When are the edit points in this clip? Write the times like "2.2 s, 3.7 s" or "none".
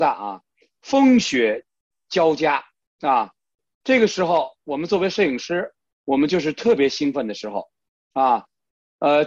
none